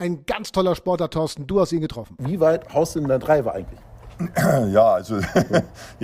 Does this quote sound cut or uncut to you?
uncut